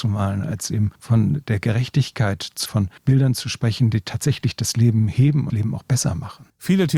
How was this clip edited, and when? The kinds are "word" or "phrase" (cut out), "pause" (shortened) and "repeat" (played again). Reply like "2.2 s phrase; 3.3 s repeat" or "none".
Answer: 1.0 s pause; 2.7 s phrase; 3.0 s pause; 5.5 s phrase